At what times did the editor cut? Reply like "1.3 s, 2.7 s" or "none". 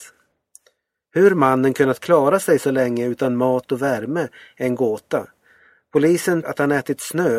6.4 s